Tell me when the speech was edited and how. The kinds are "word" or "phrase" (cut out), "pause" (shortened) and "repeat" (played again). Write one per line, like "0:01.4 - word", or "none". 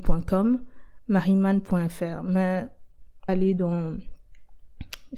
0:03.3 - phrase